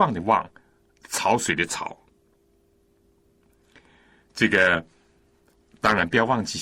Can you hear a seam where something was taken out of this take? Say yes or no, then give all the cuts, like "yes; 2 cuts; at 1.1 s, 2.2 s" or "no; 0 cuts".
no; 0 cuts